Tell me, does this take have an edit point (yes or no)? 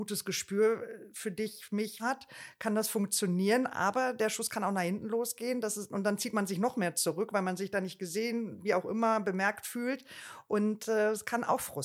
yes